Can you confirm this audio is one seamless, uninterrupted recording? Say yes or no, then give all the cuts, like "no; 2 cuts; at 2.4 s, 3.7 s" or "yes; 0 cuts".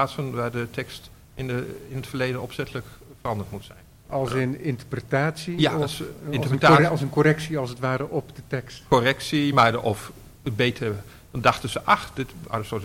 yes; 0 cuts